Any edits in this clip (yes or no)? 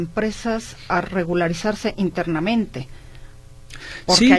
no